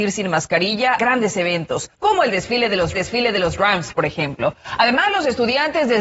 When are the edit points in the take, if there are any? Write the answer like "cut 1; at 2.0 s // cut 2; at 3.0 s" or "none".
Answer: cut 1; at 1.0 s // cut 2; at 1.9 s // cut 3; at 2.9 s